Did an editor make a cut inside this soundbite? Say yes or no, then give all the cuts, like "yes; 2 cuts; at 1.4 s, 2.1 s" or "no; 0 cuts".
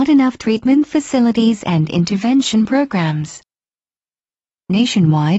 no; 0 cuts